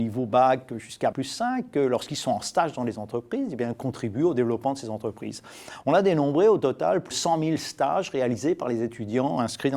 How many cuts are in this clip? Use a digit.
2